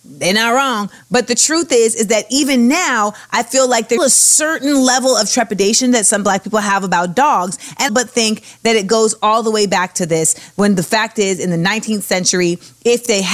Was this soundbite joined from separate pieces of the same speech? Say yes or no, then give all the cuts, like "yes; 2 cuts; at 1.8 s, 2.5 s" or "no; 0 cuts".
yes; 2 cuts; at 4.0 s, 7.9 s